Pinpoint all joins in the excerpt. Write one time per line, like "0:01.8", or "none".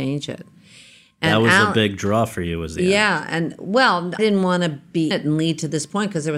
0:04.2
0:05.1